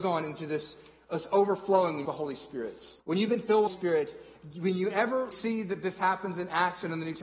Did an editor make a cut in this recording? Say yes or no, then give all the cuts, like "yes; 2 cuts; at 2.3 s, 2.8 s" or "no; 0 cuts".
yes; 4 cuts; at 2.1 s, 3.0 s, 3.7 s, 5.3 s